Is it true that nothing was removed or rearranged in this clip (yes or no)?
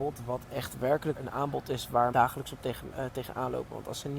no